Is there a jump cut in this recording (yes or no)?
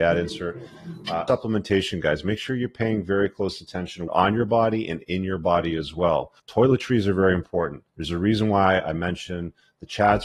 yes